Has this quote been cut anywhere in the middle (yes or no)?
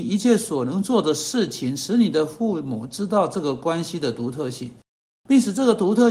no